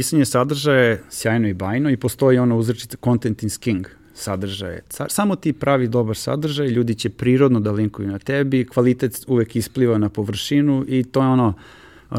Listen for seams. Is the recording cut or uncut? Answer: uncut